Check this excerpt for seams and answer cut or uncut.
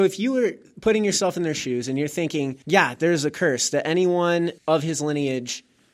cut